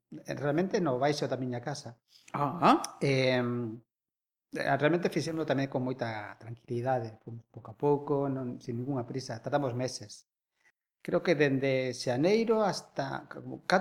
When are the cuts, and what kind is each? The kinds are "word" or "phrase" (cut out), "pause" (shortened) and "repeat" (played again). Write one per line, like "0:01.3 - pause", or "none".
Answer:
none